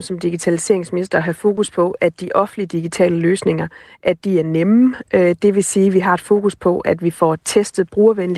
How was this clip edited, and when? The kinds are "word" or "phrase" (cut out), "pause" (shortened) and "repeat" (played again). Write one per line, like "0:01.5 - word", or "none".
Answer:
none

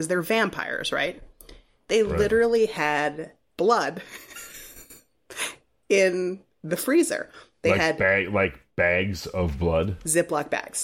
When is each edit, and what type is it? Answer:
none

